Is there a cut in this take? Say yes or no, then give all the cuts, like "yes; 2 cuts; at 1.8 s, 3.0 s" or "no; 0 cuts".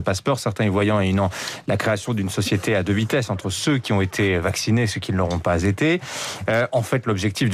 no; 0 cuts